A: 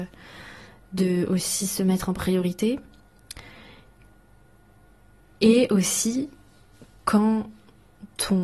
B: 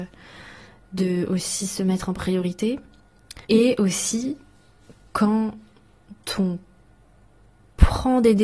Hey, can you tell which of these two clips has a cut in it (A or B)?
B